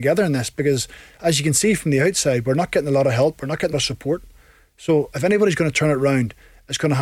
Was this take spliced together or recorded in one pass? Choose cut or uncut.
cut